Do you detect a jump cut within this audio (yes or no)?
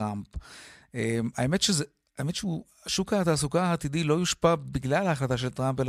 no